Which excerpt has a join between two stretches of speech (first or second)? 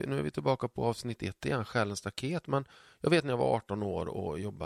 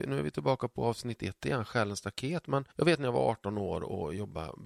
second